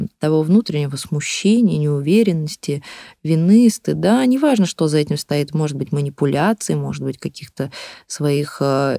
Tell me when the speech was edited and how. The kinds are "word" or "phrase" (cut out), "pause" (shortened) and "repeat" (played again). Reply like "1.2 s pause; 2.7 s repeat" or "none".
none